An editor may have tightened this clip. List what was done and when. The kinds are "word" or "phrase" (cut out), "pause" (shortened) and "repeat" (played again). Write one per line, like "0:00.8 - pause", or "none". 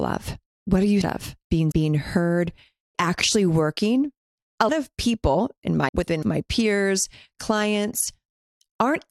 0:01.0 - word
0:01.7 - word
0:02.9 - word
0:04.7 - word
0:05.9 - word
0:06.2 - word